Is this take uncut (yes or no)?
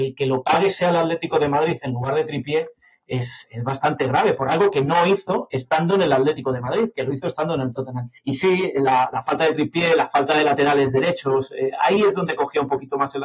no